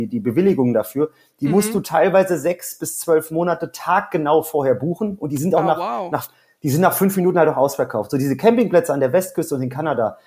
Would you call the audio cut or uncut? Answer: uncut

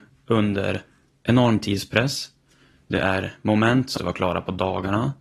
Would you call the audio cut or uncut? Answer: cut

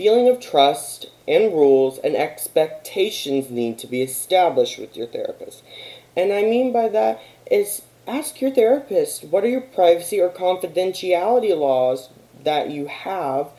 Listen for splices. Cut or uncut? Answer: uncut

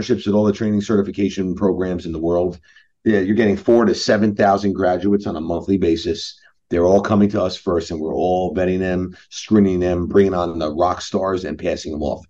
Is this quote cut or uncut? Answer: uncut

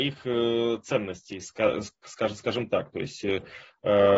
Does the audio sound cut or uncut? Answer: uncut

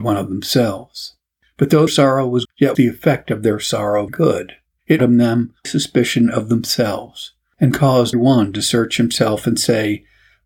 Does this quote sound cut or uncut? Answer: cut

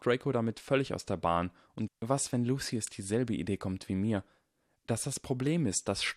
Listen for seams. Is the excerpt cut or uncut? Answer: cut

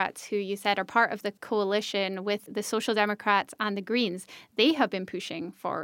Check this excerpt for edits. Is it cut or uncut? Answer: cut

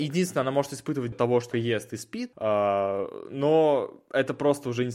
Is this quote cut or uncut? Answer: cut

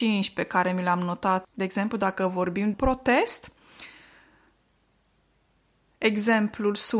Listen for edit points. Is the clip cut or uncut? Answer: cut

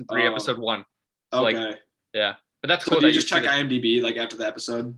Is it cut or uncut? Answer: uncut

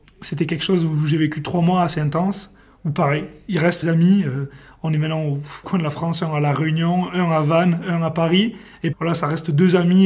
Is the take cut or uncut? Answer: cut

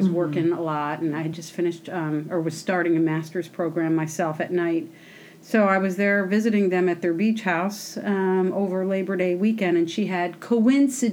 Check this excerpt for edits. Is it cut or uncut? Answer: uncut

